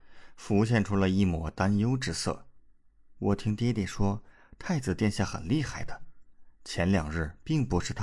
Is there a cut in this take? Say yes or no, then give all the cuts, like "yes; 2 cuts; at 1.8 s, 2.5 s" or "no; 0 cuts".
no; 0 cuts